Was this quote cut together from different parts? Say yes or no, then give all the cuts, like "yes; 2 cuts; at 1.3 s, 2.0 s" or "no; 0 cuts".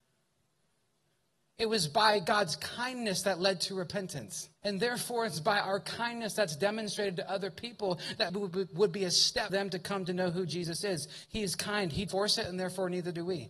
yes; 4 cuts; at 4.6 s, 8.3 s, 9.5 s, 12.1 s